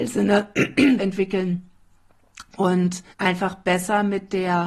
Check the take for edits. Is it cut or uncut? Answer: cut